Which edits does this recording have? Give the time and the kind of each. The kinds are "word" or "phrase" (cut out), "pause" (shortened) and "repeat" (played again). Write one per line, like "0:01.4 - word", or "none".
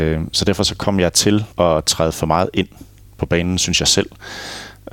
0:01.5 - pause